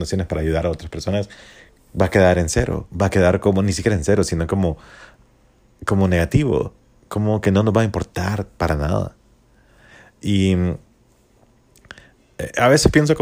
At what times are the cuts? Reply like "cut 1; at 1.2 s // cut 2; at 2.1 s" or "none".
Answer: cut 1; at 2.9 s